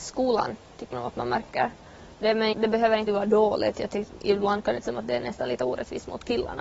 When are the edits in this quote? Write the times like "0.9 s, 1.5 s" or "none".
0.9 s, 2.5 s, 3.1 s, 4.8 s